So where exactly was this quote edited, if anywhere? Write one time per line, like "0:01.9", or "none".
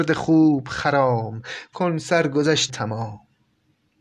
0:01.7
0:02.7

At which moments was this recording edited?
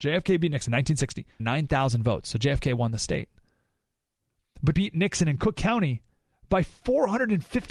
0:01.4
0:04.7

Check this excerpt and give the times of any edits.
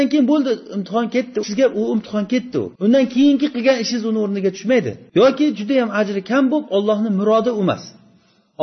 0:01.4
0:02.8
0:05.1

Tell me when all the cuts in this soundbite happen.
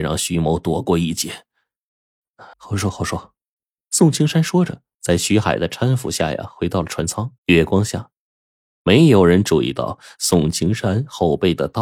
0:02.5
0:03.5
0:07.4

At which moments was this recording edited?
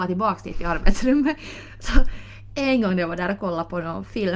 none

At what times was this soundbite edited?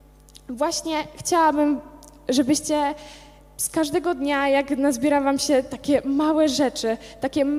none

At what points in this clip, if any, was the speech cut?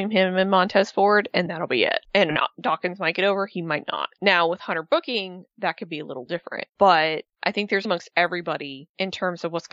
0:01.5
0:07.8

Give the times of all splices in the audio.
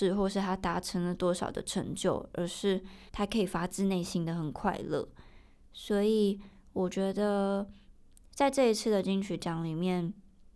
0:03.1

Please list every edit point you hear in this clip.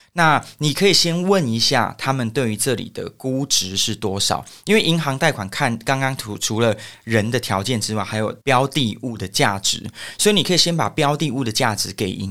0:08.4

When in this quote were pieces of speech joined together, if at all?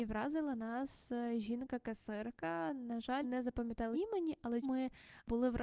0:03.2
0:03.9
0:04.6

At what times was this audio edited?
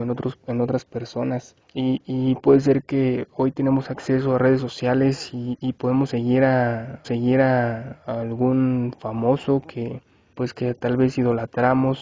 0:01.6
0:07.0
0:10.3

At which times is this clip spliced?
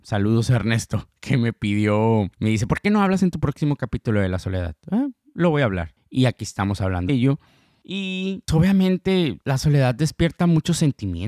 0:06.0
0:07.1
0:08.5

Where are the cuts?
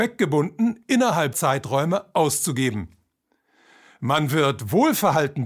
0:01.3

